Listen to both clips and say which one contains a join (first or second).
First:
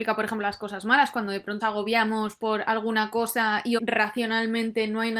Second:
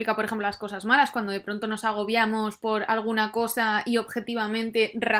first